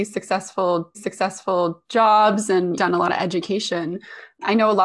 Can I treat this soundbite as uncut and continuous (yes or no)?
no